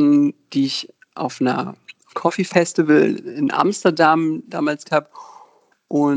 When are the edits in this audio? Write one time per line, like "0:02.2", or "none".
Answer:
0:02.1
0:04.8

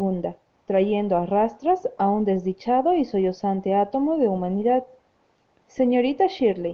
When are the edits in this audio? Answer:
none

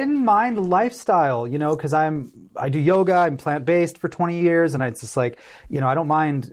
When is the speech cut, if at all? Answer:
none

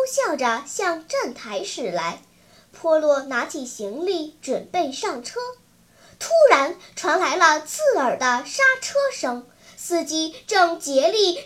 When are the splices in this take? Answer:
none

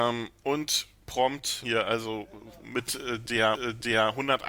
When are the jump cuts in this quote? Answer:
0:01.6
0:03.5

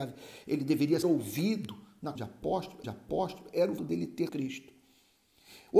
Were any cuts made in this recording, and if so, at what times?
0:01.0
0:02.2
0:02.8
0:03.8
0:04.3

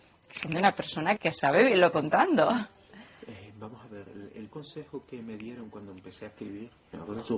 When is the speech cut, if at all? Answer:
0:01.2
0:01.9
0:04.5

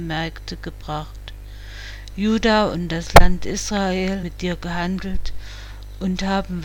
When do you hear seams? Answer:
0:04.2

